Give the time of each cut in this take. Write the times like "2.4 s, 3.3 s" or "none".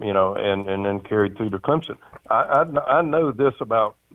none

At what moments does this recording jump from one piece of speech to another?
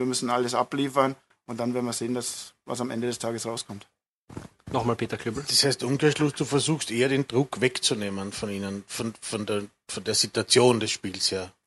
none

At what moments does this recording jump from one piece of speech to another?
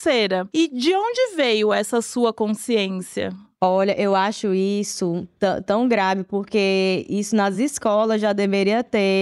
none

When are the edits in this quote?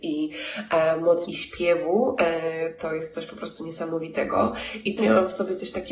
1.3 s, 5.0 s

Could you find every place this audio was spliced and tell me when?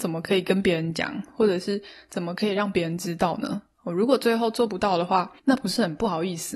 5.4 s

